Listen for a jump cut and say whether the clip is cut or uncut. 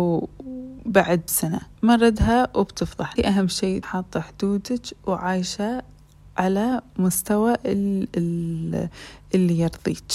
cut